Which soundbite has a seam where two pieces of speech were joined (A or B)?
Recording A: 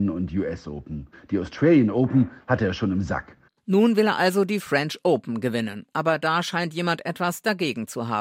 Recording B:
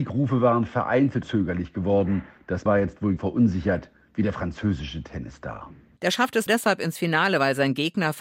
B